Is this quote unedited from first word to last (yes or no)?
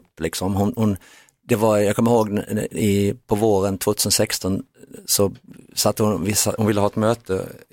yes